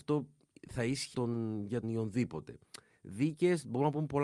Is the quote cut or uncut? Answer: cut